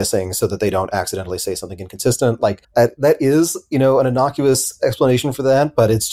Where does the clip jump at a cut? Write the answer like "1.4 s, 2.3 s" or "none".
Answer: 2.6 s